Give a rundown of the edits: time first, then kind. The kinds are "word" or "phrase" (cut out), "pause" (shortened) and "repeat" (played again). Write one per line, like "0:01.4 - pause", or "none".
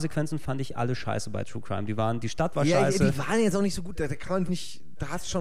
0:04.5 - word